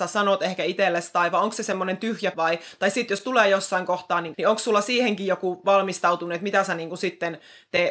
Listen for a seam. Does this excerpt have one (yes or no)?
yes